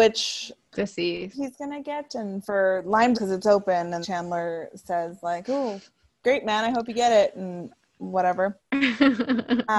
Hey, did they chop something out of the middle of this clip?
yes; 4 cuts; at 1.3 s, 2.4 s, 3.1 s, 4.0 s

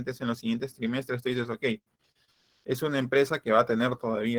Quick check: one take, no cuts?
yes; 0 cuts

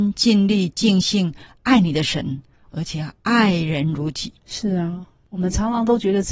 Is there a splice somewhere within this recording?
yes; 1 cut; at 4.4 s

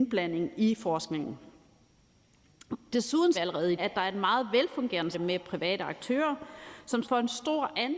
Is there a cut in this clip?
yes; 4 cuts; at 3.3 s, 3.8 s, 5.1 s, 7.0 s

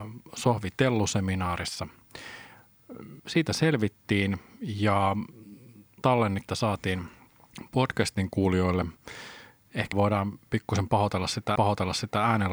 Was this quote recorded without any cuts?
no; 5 cuts; at 3.2 s, 6.0 s, 6.5 s, 9.9 s, 11.6 s

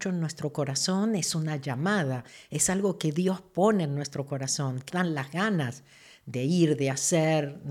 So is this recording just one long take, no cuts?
no; 1 cut; at 4.9 s

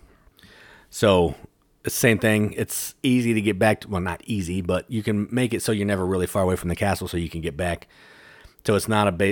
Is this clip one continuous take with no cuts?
yes; 0 cuts

